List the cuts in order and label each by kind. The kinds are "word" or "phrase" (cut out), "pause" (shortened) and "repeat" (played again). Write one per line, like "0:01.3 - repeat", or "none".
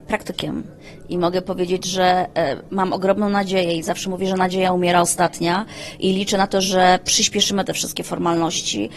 none